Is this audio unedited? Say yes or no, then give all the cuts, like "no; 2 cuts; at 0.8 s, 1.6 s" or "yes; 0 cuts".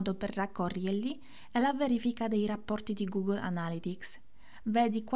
yes; 0 cuts